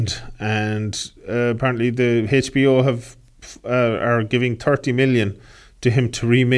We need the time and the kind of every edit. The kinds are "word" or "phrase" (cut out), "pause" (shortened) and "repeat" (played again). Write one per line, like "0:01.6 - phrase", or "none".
0:01.2 - pause